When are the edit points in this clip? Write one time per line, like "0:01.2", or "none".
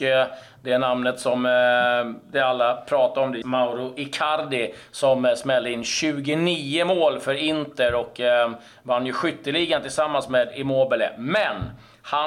0:03.4